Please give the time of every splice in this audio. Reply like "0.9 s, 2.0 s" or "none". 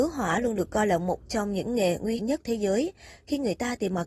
2.2 s